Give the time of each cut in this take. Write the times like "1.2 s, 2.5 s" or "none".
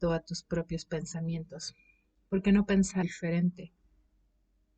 3.0 s